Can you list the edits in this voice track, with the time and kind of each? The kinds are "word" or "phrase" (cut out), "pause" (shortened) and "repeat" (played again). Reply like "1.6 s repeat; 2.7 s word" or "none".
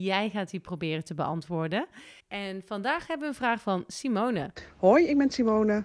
2.2 s pause